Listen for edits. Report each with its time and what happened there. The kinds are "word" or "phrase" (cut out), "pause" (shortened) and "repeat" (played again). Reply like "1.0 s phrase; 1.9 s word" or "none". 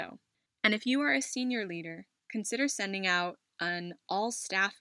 2.2 s pause